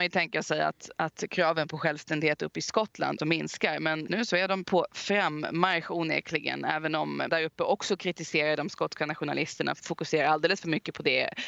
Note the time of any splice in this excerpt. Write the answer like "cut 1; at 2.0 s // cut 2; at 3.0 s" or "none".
cut 1; at 3.2 s // cut 2; at 4.1 s // cut 3; at 4.6 s // cut 4; at 7.3 s // cut 5; at 9.8 s